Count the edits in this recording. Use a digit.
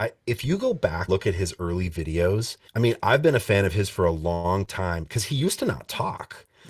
2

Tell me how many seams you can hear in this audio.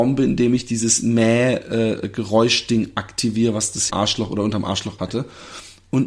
2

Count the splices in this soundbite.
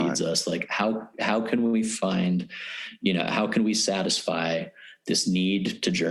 0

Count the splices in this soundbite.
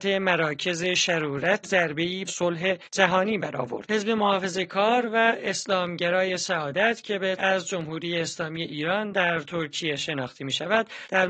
4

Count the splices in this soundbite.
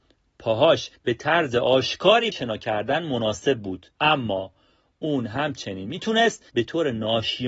4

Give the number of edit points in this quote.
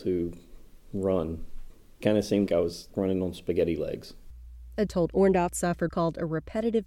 5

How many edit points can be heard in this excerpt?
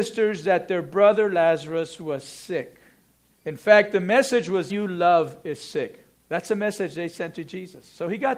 1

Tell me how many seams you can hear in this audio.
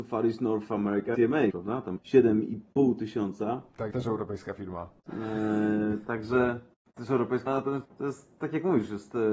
7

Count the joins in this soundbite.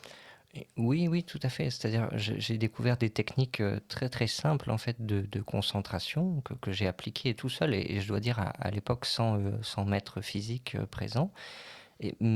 0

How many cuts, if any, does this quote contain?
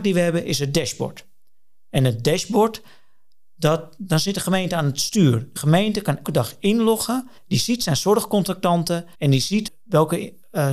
4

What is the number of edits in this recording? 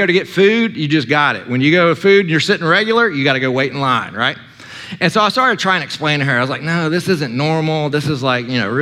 0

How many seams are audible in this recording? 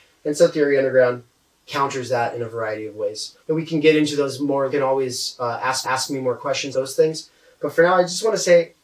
4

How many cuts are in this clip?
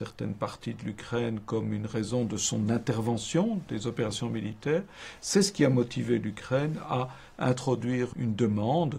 0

